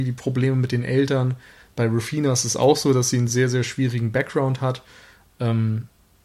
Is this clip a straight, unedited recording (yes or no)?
yes